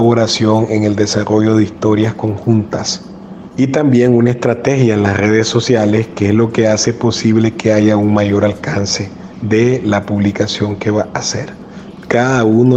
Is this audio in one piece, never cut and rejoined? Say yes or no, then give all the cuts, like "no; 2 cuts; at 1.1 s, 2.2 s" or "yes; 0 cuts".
yes; 0 cuts